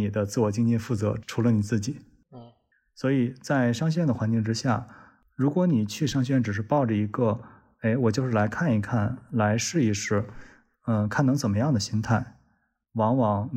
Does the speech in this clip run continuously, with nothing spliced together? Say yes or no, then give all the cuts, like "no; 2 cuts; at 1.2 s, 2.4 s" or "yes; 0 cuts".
yes; 0 cuts